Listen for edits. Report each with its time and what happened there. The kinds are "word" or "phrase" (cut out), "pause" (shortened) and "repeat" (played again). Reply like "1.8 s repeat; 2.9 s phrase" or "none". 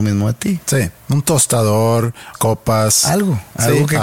1.0 s pause; 2.3 s word